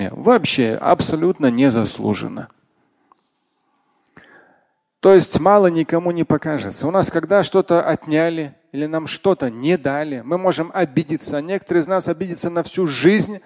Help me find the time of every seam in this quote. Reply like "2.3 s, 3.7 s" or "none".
none